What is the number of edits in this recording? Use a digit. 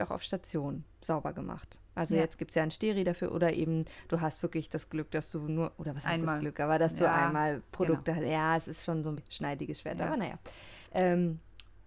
3